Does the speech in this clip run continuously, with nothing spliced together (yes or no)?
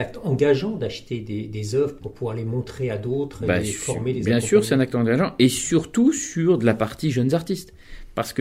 yes